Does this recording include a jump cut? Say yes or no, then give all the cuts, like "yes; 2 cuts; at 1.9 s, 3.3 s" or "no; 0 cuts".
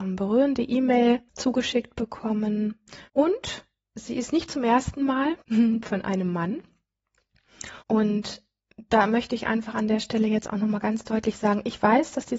yes; 4 cuts; at 1.3 s, 3.1 s, 5.4 s, 7.8 s